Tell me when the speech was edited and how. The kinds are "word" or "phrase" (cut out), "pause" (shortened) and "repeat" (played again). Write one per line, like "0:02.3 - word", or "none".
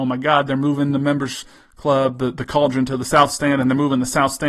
none